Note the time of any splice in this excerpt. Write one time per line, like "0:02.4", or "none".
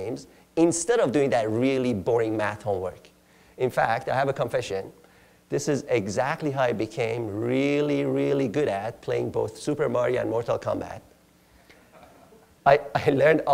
none

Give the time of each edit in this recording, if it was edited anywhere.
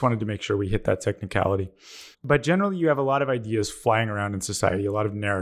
0:02.1

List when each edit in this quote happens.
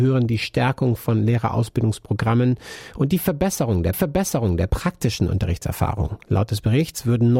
0:03.9

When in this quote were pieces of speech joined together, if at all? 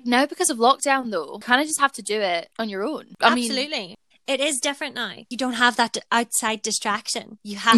0:04.1

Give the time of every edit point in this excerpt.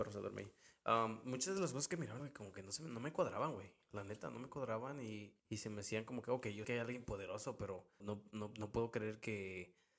0:02.2
0:05.4
0:06.6
0:08.0

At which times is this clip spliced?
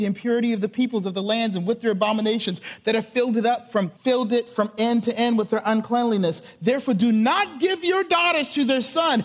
0:04.0

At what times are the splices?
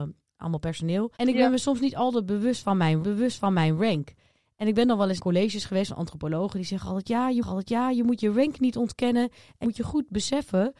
0:01.2
0:03.0
0:05.2
0:07.4
0:09.6

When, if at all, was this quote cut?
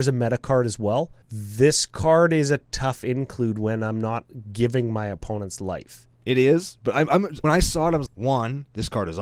0:01.2
0:06.1
0:07.4
0:08.1

